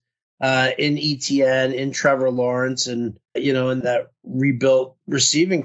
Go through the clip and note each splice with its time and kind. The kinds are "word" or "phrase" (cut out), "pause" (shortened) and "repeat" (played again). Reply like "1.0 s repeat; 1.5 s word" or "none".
3.4 s word; 3.8 s word

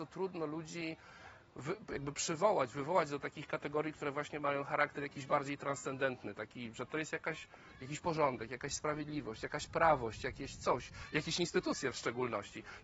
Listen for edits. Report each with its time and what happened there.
none

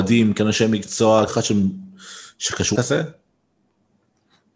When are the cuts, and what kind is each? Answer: 1.3 s phrase; 2.8 s word

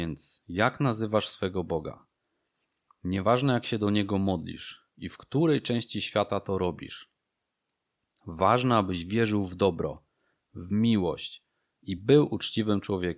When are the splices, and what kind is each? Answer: none

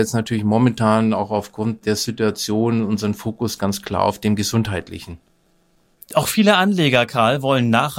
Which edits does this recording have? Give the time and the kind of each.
none

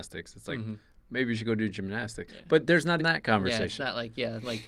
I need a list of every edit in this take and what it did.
3.0 s word

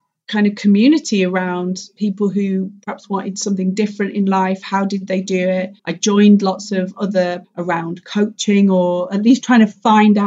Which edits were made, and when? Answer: 5.8 s pause; 7.4 s word

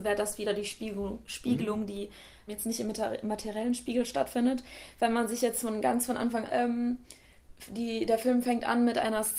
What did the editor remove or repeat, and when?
2.5 s word; 6.5 s word

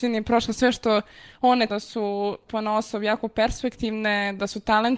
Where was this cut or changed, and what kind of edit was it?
1.7 s phrase; 2.5 s word

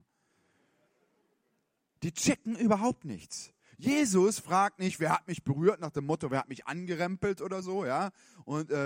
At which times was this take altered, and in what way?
none

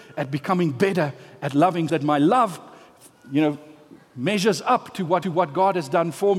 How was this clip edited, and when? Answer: 1.9 s word; 5.2 s repeat

